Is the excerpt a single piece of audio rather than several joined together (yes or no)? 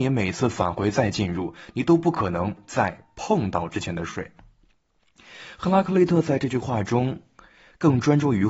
yes